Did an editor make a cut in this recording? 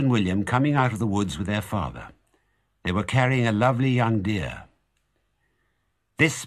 no; 0 cuts

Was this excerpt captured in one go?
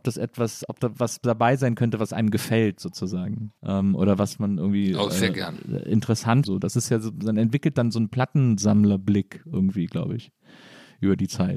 no; 2 cuts; at 3.6 s, 6.4 s

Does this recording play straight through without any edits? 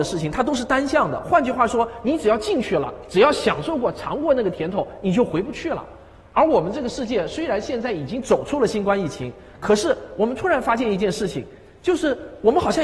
yes; 0 cuts

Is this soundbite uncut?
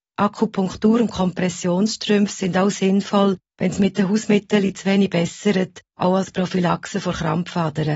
yes; 0 cuts

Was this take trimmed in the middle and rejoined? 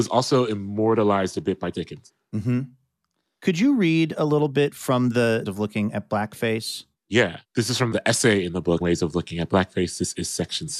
yes; 3 cuts; at 1.7 s, 5.5 s, 8.8 s

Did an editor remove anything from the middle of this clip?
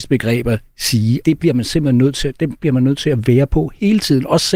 yes; 2 cuts; at 1.2 s, 2.6 s

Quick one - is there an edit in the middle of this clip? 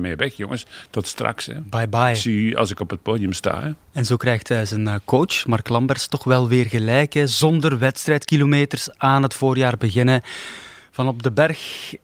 no; 0 cuts

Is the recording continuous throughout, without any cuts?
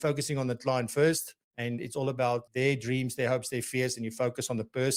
no; 2 cuts; at 1.4 s, 2.5 s

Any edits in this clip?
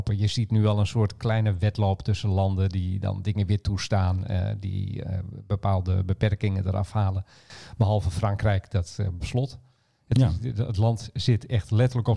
yes; 1 cut; at 9.2 s

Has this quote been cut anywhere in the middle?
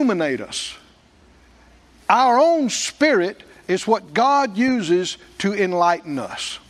no; 0 cuts

